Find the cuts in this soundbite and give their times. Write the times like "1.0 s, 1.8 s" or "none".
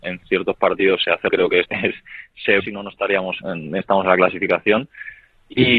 1.3 s, 1.6 s, 2.6 s, 3.4 s, 3.8 s